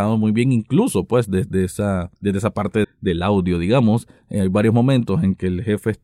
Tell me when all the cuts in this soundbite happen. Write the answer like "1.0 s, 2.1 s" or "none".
2.2 s, 2.8 s